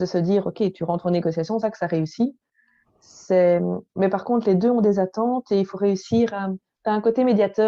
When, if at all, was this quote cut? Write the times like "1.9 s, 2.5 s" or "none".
1.6 s